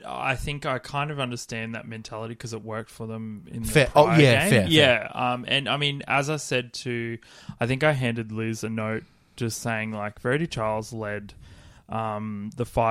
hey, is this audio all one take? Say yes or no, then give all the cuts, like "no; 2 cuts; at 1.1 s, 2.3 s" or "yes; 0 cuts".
yes; 0 cuts